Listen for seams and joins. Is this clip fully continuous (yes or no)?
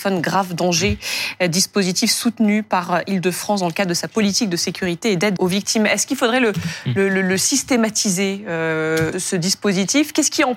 no